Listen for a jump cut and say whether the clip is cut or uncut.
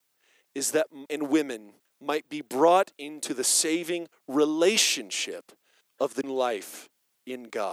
cut